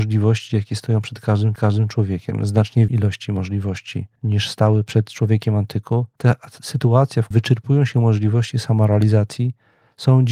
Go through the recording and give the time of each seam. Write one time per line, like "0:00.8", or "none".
0:01.6
0:02.9
0:04.2
0:06.1
0:07.3